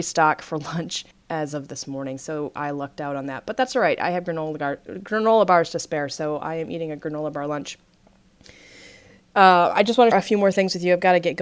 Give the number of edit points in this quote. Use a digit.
2